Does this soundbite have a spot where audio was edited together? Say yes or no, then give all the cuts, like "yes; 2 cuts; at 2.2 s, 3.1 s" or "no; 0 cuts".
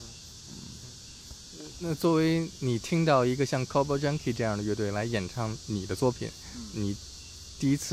no; 0 cuts